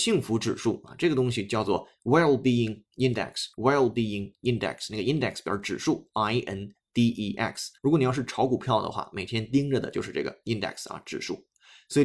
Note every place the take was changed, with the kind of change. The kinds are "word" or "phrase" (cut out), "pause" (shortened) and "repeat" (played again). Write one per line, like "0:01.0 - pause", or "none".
0:03.5 - pause
0:07.8 - pause